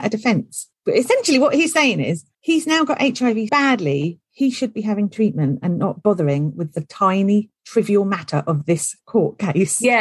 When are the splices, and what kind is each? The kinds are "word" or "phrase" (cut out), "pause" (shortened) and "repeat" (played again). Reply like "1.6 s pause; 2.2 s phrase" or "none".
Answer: 3.5 s word